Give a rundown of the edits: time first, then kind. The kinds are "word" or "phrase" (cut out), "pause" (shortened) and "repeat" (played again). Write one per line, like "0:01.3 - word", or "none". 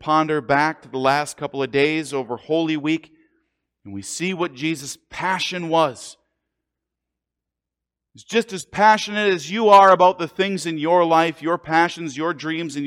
none